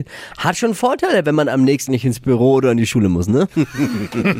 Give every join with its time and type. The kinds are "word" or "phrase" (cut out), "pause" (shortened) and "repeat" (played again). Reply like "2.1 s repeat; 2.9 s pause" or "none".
1.9 s word

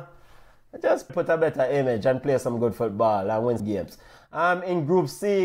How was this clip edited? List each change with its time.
1.1 s word; 3.6 s word

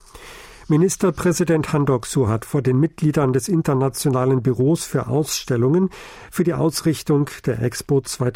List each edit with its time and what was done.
none

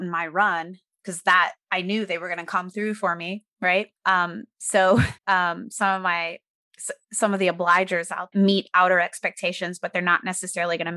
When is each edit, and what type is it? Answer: 4.0 s pause; 5.2 s pause; 8.3 s phrase

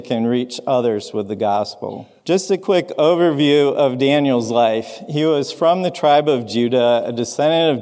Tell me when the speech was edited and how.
2.2 s pause

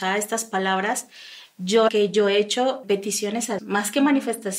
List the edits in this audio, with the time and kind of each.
1.9 s word; 2.8 s word; 3.6 s word

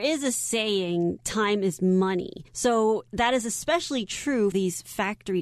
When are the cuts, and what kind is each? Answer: 2.5 s pause; 4.5 s word

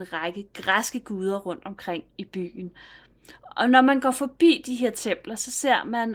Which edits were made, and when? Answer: none

